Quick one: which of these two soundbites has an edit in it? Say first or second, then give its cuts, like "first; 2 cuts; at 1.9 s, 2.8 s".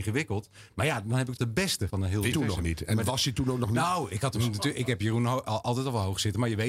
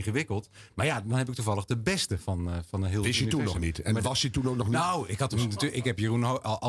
first; 3 cuts; at 1.4 s, 1.9 s, 2.3 s